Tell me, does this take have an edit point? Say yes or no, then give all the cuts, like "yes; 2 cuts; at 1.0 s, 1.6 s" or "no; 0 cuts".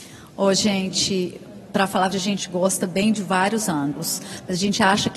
yes; 1 cut; at 2.1 s